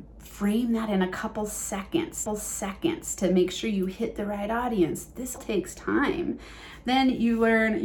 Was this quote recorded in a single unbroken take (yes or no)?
no